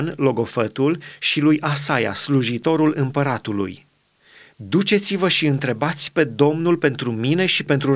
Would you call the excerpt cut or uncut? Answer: uncut